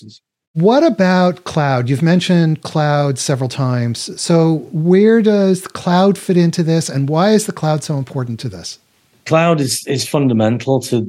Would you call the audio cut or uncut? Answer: uncut